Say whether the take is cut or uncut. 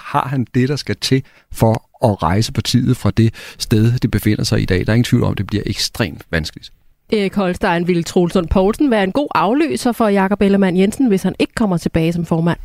uncut